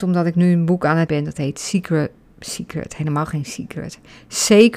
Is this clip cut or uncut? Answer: cut